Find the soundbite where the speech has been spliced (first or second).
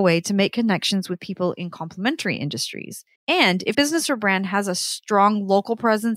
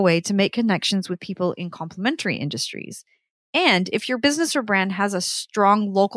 first